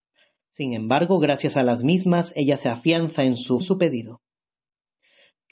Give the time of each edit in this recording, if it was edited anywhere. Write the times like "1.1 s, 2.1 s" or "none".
3.6 s